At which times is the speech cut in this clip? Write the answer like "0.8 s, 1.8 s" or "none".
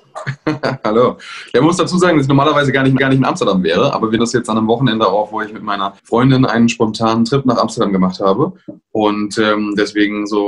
3.0 s, 4.2 s, 6.0 s